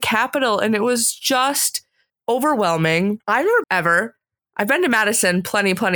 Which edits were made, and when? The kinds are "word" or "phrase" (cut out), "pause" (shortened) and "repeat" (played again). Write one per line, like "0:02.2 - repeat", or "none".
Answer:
0:02.1 - word
0:03.2 - pause
0:03.6 - phrase
0:04.4 - pause